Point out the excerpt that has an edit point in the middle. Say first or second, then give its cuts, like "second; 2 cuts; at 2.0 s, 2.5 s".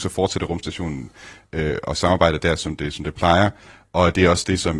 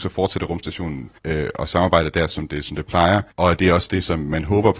second; 2 cuts; at 1.2 s, 3.3 s